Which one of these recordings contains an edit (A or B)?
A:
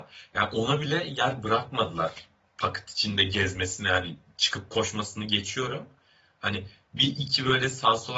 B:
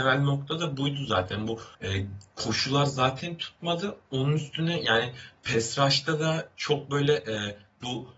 B